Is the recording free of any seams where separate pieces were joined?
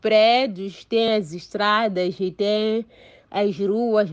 yes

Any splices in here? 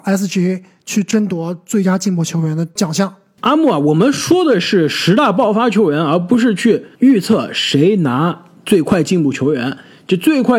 yes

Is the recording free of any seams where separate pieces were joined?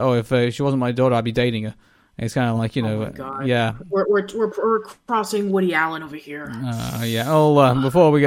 yes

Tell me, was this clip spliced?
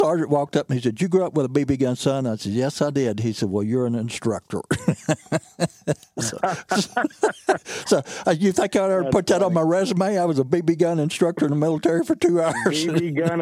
no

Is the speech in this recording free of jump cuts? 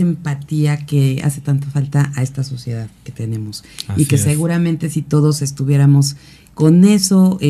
yes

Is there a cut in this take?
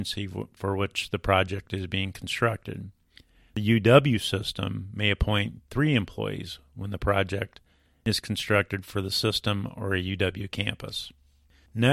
no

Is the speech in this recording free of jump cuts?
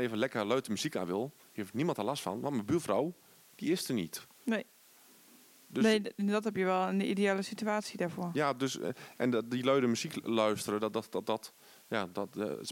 yes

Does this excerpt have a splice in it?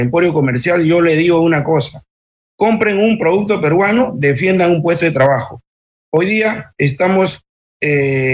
no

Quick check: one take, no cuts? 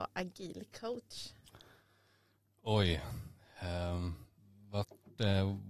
yes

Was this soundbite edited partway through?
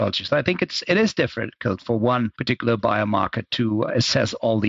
no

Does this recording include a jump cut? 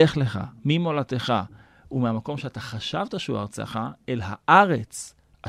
no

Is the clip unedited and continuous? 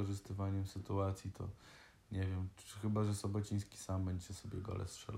yes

